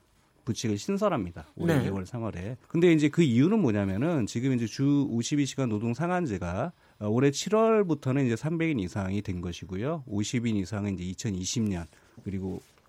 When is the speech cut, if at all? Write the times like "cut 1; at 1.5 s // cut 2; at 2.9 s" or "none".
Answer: cut 1; at 2.6 s // cut 2; at 6.9 s